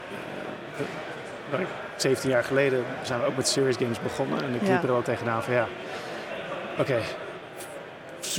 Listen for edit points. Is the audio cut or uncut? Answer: cut